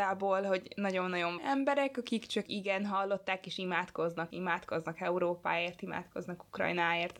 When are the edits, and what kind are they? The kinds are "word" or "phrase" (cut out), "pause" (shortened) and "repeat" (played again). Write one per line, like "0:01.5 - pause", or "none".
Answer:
0:01.4 - phrase
0:02.5 - phrase
0:04.3 - word